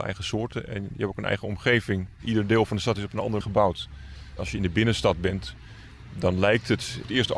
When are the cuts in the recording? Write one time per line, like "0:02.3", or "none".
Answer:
0:03.4